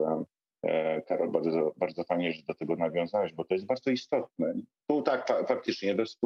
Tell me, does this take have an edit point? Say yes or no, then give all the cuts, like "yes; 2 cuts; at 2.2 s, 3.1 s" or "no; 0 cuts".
no; 0 cuts